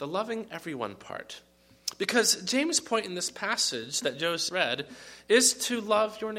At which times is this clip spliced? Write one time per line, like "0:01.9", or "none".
0:04.5